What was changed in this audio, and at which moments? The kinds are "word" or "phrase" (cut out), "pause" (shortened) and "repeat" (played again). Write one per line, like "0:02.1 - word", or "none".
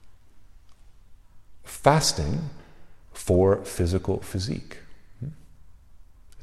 0:03.0 - pause